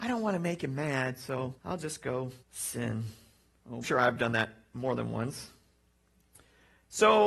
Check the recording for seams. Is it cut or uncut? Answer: cut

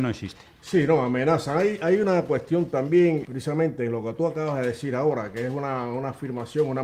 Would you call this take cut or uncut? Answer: cut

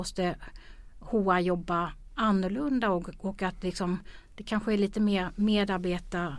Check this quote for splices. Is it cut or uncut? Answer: uncut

